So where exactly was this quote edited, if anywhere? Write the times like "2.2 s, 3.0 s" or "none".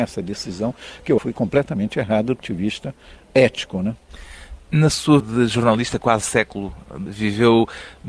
1.2 s, 2.4 s, 5.2 s, 6.2 s, 7.1 s